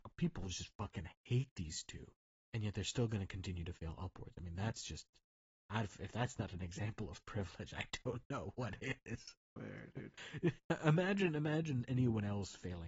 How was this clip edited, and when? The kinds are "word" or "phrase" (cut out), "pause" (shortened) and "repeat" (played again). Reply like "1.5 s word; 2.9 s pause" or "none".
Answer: 2.2 s pause; 9.4 s pause